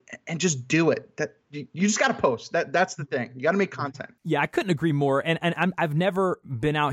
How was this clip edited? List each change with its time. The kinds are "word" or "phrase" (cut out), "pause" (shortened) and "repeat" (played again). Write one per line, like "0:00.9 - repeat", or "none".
0:01.4 - pause
0:04.2 - pause